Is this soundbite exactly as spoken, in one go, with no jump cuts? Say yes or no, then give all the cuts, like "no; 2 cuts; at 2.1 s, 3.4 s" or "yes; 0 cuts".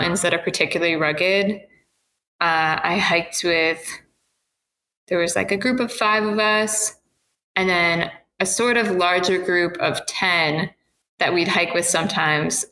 yes; 0 cuts